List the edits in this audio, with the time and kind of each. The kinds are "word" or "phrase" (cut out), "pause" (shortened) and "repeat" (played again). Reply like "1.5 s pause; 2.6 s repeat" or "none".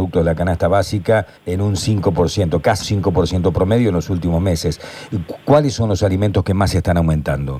1.4 s pause; 2.8 s word